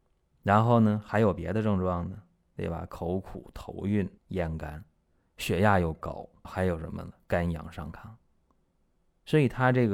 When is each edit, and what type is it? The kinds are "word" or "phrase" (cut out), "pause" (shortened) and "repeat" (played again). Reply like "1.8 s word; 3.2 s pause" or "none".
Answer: 4.2 s pause; 6.4 s word